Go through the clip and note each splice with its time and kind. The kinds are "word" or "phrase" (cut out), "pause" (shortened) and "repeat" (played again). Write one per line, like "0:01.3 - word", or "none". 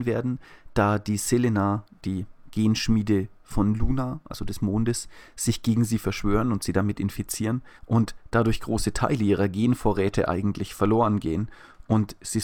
0:07.8 - pause